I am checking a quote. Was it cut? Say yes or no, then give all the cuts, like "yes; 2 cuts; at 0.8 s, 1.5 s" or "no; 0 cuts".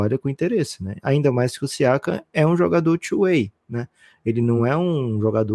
no; 0 cuts